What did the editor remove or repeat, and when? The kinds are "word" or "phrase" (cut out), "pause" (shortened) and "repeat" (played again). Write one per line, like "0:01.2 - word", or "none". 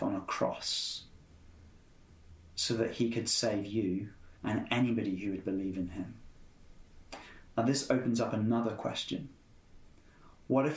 0:04.4 - pause